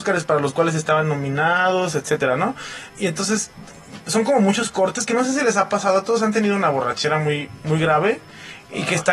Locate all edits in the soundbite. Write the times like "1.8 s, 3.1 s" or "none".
2.9 s